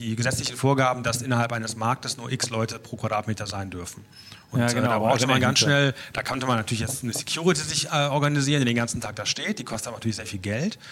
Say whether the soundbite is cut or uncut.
uncut